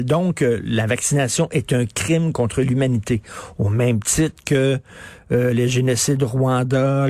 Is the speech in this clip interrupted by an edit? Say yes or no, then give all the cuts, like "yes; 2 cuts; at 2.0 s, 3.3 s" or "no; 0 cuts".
no; 0 cuts